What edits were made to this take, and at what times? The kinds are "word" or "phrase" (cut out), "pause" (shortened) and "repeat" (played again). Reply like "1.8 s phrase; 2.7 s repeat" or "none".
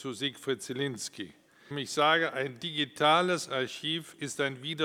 1.7 s word